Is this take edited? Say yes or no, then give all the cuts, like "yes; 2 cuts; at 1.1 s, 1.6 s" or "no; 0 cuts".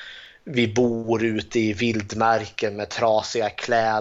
no; 0 cuts